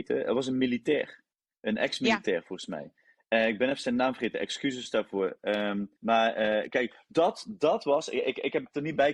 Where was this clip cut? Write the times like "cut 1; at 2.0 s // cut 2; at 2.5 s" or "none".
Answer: cut 1; at 1.3 s // cut 2; at 6.0 s